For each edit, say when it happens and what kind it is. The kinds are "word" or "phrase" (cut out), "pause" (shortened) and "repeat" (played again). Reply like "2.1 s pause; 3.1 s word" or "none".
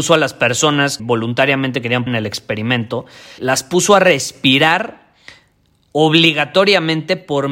1.0 s word; 2.1 s word; 3.4 s word